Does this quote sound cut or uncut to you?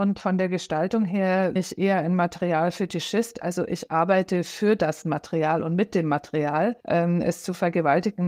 cut